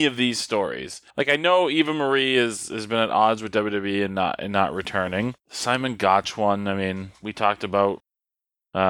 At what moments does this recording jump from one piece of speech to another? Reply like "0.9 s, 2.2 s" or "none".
1.1 s, 5.4 s